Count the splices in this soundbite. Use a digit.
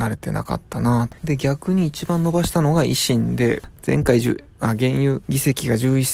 1